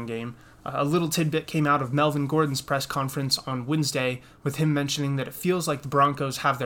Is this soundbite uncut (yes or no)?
yes